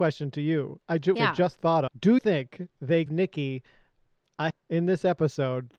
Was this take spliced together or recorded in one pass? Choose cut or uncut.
cut